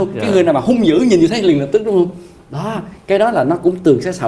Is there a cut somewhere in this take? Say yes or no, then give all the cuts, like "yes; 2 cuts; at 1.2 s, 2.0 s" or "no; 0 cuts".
no; 0 cuts